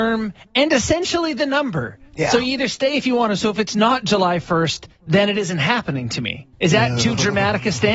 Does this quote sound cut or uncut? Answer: cut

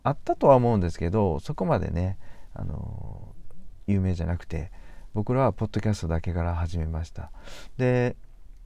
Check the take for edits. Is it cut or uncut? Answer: cut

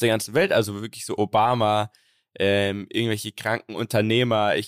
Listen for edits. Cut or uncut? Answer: uncut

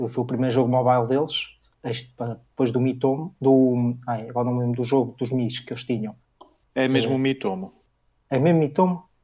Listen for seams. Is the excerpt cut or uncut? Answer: uncut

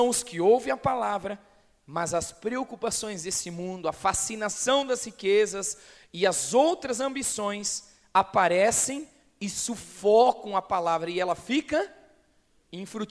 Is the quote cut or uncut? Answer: uncut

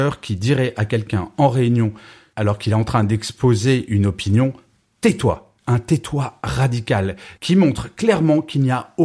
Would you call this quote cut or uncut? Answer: uncut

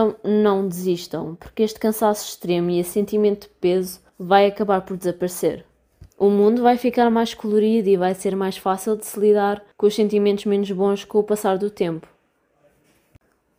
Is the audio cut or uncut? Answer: cut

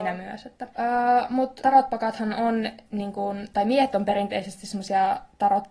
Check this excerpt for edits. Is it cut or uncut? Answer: uncut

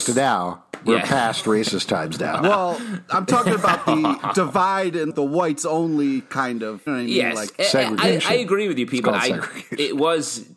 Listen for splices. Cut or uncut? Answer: cut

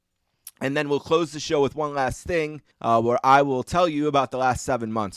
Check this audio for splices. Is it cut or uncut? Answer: cut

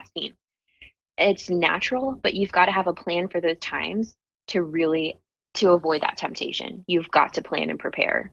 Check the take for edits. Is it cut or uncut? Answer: uncut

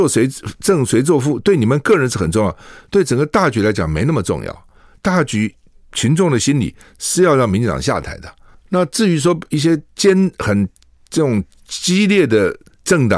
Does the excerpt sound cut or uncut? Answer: uncut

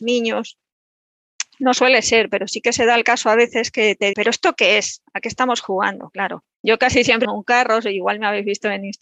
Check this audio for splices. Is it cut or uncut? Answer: cut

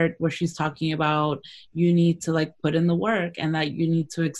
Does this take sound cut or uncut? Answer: uncut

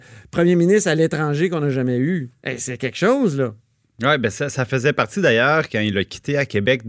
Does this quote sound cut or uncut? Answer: uncut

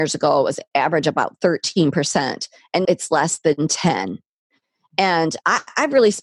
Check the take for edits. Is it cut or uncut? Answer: cut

